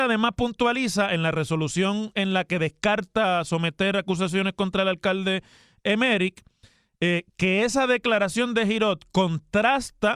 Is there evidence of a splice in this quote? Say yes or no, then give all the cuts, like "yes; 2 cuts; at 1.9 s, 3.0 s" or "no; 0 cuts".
no; 0 cuts